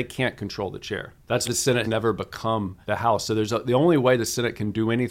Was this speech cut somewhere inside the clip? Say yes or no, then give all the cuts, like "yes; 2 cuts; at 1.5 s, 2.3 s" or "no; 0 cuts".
yes; 3 cuts; at 1.5 s, 1.8 s, 2.8 s